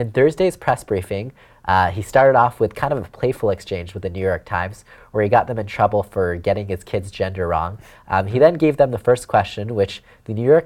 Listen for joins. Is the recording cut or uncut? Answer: uncut